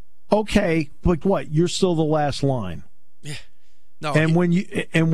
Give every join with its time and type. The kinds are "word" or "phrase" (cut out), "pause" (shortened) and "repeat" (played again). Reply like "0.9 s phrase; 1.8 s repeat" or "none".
1.2 s word

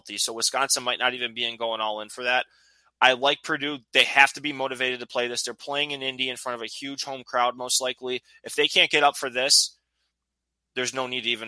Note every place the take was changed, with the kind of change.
none

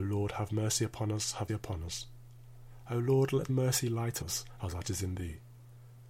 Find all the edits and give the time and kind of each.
1.5 s word; 3.5 s word; 4.2 s word; 4.8 s word

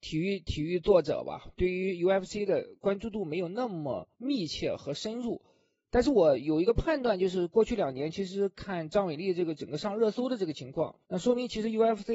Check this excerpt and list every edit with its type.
4.1 s pause; 11.0 s pause

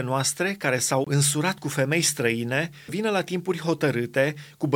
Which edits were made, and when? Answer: 2.9 s word

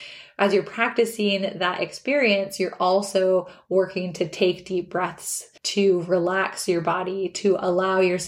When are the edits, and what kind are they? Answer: 5.6 s pause

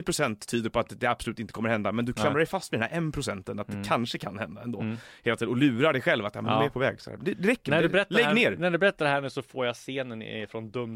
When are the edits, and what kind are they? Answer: none

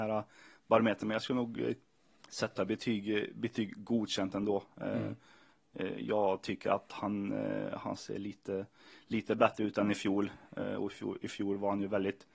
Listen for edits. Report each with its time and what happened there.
none

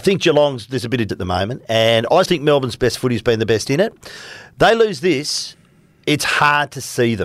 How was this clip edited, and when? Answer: 1.1 s word; 2.2 s word

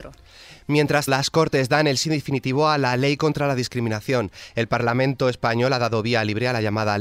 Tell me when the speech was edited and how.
1.1 s word

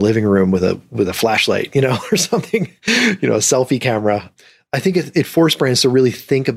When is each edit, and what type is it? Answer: none

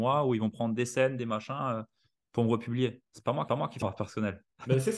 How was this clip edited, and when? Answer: 3.5 s repeat; 3.8 s word

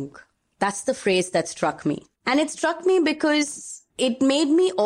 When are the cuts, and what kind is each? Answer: 2.2 s pause; 3.9 s pause

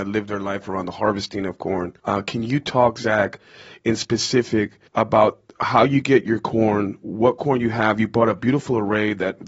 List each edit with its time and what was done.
2.0 s pause; 4.9 s pause

